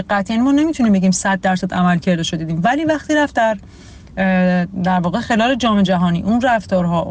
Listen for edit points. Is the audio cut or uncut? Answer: uncut